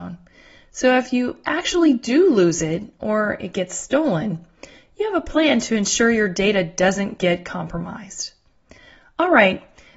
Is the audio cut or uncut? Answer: uncut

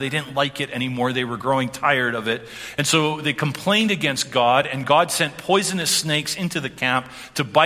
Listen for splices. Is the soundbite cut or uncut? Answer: uncut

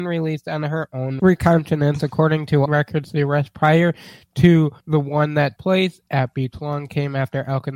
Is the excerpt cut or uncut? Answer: cut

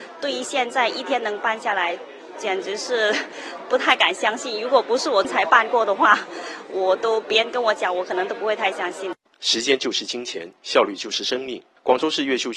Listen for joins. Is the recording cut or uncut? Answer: cut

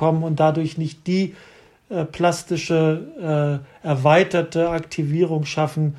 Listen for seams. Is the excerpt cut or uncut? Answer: uncut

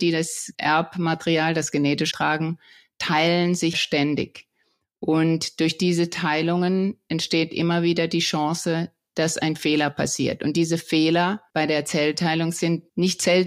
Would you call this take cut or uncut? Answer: cut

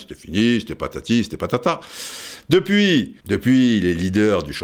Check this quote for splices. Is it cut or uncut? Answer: cut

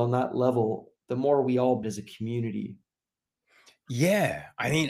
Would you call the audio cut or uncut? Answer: cut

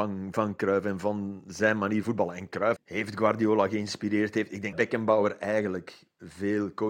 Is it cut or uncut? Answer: cut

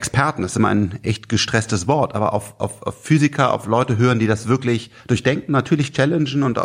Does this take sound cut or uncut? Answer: uncut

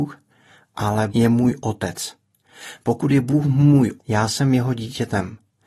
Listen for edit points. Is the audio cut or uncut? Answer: cut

